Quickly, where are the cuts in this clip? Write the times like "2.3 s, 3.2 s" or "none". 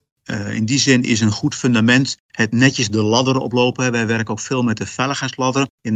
none